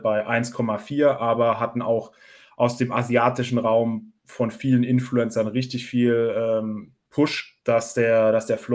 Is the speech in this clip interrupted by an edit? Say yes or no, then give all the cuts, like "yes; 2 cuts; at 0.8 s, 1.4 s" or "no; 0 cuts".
no; 0 cuts